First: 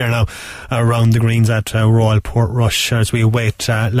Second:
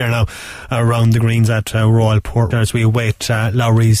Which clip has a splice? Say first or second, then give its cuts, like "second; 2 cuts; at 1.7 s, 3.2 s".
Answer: second; 1 cut; at 2.5 s